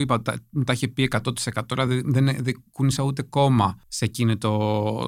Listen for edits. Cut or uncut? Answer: uncut